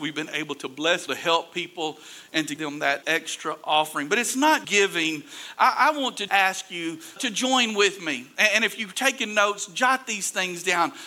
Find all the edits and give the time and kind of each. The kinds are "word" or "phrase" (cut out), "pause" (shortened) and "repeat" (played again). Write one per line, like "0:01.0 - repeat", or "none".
0:01.1 - word
0:02.6 - word
0:03.0 - word
0:04.6 - word
0:06.3 - word
0:07.2 - word